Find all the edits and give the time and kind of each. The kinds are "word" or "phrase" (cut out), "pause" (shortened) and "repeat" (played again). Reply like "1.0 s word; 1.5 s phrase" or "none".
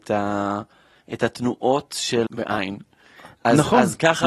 2.3 s word